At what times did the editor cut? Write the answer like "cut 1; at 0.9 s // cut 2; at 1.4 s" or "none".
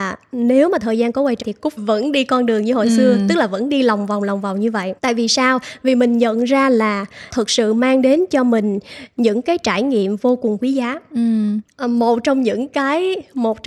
cut 1; at 1.4 s // cut 2; at 1.8 s // cut 3; at 5.0 s // cut 4; at 7.3 s

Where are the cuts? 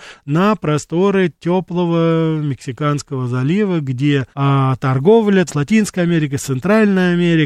cut 1; at 4.3 s // cut 2; at 5.5 s

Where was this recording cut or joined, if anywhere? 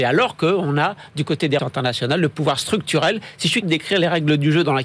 cut 1; at 1.6 s // cut 2; at 3.6 s

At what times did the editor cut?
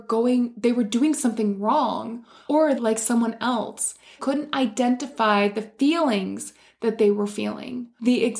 cut 1; at 2.8 s // cut 2; at 4.2 s

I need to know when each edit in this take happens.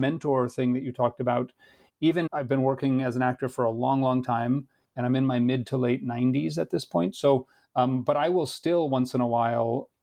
cut 1; at 2.3 s

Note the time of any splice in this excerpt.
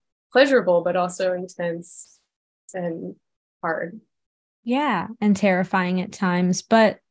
none

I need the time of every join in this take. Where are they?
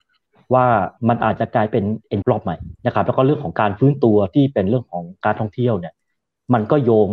cut 1; at 1.0 s // cut 2; at 2.2 s // cut 3; at 2.8 s

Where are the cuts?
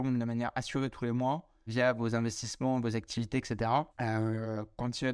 cut 1; at 1.7 s // cut 2; at 3.9 s

